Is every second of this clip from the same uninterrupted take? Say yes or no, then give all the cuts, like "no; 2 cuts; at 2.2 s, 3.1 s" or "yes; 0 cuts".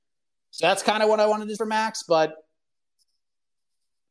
no; 1 cut; at 1.6 s